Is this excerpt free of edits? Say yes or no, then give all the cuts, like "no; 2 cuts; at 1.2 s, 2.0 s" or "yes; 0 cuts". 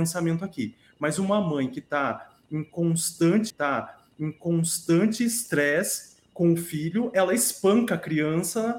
no; 1 cut; at 3.5 s